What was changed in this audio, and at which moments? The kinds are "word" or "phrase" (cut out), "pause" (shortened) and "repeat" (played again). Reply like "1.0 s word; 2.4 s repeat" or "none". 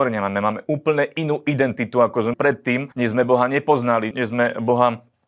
2.3 s word; 2.9 s pause; 4.1 s word